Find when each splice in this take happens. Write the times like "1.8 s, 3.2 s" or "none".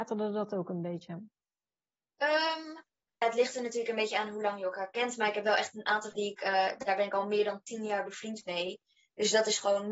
3.2 s, 6.1 s